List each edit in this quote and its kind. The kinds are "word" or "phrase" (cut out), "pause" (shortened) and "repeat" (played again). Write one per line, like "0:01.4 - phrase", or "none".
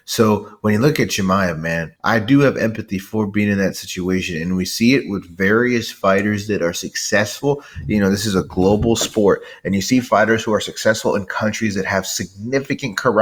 0:02.0 - pause